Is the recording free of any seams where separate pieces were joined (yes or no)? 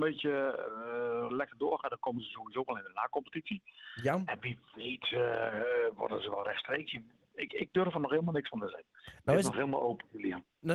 no